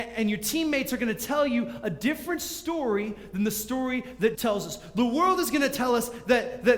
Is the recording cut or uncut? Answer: cut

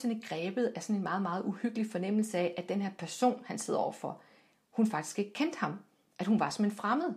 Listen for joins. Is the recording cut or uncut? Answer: uncut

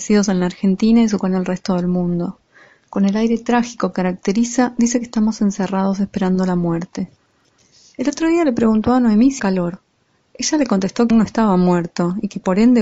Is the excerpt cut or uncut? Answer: cut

